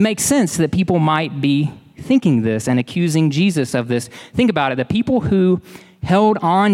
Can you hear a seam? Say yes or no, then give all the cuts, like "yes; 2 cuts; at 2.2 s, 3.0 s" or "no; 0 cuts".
no; 0 cuts